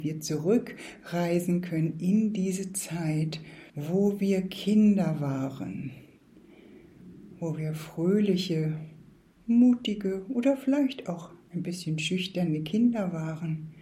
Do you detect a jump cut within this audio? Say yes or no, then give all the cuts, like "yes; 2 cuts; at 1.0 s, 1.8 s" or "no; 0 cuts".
yes; 2 cuts; at 3.7 s, 9.2 s